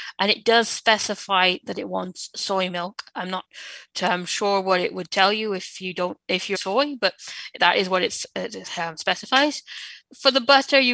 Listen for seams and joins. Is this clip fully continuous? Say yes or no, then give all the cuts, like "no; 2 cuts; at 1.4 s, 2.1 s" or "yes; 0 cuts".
no; 1 cut; at 6.5 s